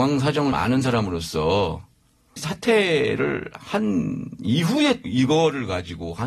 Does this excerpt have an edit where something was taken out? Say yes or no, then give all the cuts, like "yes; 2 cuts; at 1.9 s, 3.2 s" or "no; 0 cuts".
yes; 2 cuts; at 2.4 s, 5.0 s